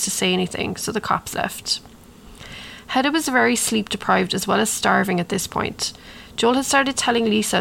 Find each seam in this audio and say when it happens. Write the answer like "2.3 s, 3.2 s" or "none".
none